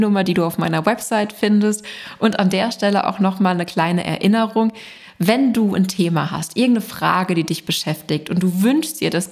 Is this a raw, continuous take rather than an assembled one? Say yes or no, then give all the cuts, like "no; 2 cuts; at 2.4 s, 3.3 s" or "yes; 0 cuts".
yes; 0 cuts